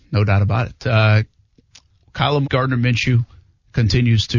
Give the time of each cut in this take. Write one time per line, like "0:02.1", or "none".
0:02.4